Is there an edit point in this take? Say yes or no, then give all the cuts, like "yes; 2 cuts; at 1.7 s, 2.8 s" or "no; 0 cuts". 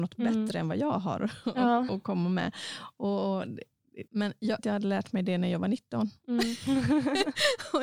yes; 3 cuts; at 1.9 s, 4.1 s, 4.6 s